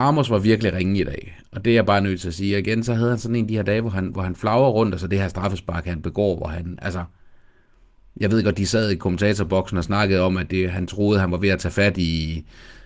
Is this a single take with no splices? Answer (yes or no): yes